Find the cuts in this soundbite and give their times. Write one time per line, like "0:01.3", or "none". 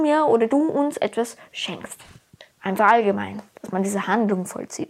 0:02.5

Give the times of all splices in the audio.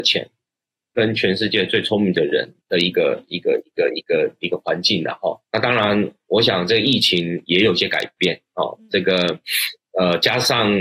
0:02.6
0:05.4

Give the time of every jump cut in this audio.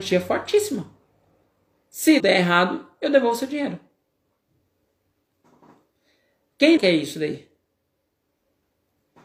0:02.2
0:06.8

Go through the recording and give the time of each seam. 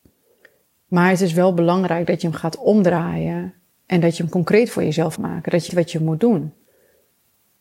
0:05.2
0:05.7

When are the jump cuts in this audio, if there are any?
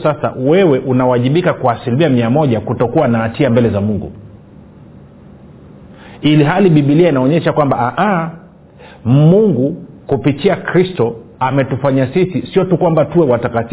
none

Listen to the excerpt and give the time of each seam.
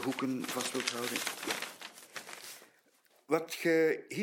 none

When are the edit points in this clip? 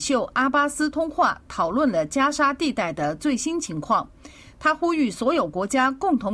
none

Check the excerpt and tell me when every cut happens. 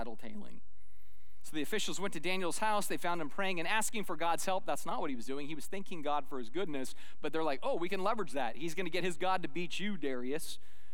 none

